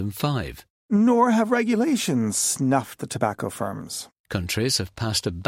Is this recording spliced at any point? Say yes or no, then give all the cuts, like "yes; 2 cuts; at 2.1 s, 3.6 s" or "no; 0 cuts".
yes; 1 cut; at 3.0 s